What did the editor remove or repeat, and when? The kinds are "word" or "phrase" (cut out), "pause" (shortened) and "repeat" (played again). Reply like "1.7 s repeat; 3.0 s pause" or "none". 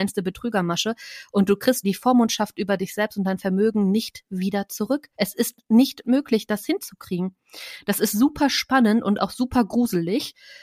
1.8 s word; 5.1 s pause; 6.0 s phrase